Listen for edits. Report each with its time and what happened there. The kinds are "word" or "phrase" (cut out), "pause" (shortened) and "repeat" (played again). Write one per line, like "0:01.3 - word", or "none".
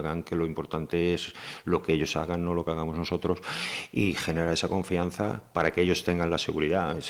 none

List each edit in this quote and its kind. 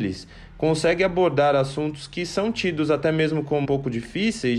0:03.6 - word

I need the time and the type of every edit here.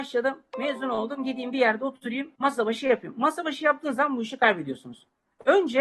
0:02.3 - pause

